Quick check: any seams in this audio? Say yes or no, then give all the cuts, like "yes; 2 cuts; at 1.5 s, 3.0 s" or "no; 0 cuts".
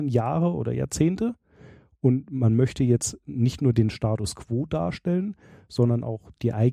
no; 0 cuts